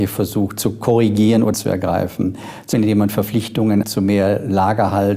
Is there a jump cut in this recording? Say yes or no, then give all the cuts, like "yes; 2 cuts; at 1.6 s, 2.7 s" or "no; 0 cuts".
yes; 3 cuts; at 1.5 s, 2.7 s, 3.8 s